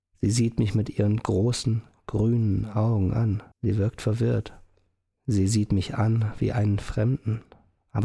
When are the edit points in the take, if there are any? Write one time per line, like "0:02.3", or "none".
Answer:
0:03.5